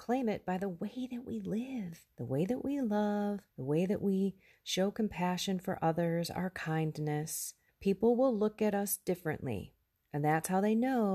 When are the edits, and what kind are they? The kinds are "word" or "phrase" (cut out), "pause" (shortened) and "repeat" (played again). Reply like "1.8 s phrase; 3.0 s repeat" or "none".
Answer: 2.1 s pause; 3.5 s pause; 7.7 s pause; 9.9 s pause